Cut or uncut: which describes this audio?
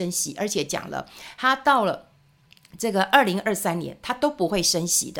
uncut